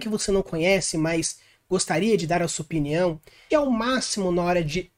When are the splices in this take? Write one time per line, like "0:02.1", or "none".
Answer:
0:03.5